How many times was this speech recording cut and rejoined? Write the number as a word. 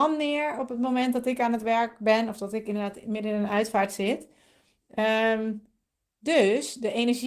zero